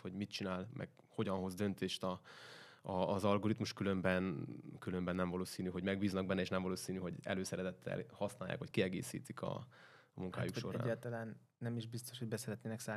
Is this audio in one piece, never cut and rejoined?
yes; 0 cuts

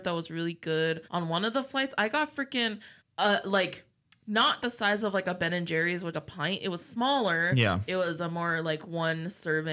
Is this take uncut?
no; 4 cuts; at 1.0 s, 3.0 s, 4.6 s, 6.1 s

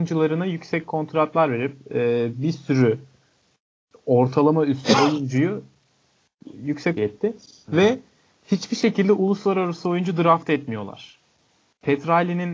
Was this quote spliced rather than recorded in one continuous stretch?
yes; 1 cut; at 7.0 s

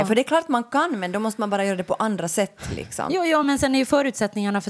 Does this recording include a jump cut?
no; 0 cuts

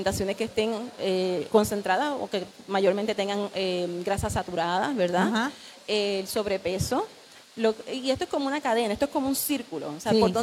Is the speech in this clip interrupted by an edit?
no; 0 cuts

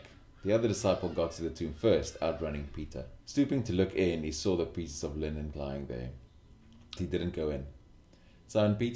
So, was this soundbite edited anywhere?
yes; 3 cuts; at 3.2 s, 5.5 s, 7.0 s

